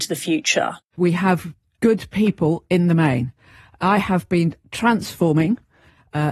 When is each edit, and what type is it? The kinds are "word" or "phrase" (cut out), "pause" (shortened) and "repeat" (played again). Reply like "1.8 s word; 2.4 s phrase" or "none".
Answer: none